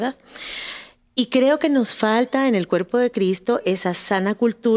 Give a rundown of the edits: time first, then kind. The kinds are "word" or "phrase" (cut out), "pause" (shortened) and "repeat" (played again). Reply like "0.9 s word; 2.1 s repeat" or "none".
none